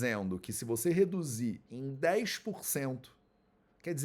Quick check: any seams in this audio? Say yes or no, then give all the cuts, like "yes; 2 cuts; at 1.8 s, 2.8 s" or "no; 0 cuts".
no; 0 cuts